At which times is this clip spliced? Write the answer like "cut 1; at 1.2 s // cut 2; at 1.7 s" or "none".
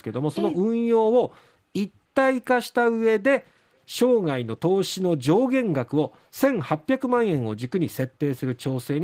none

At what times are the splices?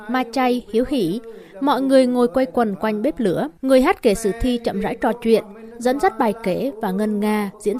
cut 1; at 3.6 s

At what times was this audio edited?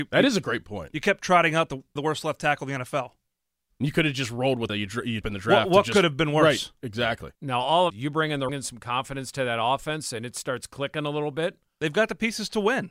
cut 1; at 2.0 s // cut 2; at 4.7 s // cut 3; at 5.2 s // cut 4; at 7.3 s // cut 5; at 7.9 s // cut 6; at 8.5 s

